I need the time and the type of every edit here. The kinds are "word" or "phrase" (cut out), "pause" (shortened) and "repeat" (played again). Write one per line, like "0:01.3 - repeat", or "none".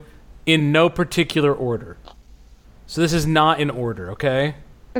none